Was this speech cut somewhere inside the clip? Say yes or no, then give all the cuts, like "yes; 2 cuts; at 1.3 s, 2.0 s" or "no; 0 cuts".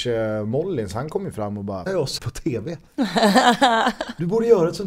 yes; 2 cuts; at 1.9 s, 2.2 s